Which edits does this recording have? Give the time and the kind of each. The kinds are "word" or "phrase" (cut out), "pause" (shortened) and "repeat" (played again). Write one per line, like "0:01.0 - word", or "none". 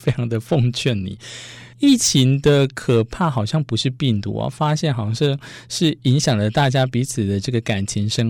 0:01.7 - pause